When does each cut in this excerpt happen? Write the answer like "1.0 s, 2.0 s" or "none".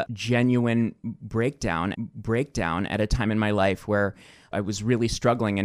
1.9 s, 4.5 s